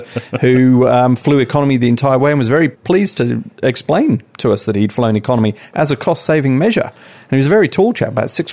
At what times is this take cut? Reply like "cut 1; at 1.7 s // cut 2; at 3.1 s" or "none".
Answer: cut 1; at 2.7 s